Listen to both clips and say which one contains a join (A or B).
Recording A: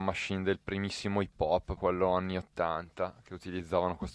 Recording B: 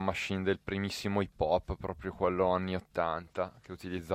A